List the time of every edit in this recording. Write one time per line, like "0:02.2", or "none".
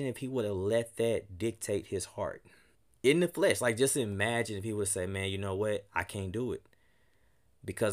0:02.8